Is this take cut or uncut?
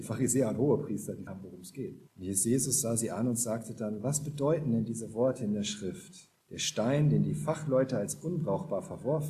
cut